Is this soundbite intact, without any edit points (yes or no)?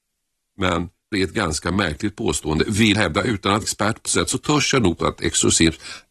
no